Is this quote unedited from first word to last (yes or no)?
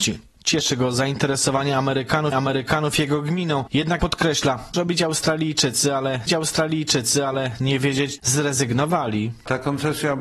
no